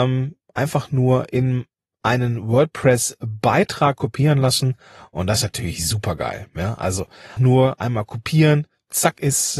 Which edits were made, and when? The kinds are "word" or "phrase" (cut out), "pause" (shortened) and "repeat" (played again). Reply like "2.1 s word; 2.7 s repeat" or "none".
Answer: 7.4 s word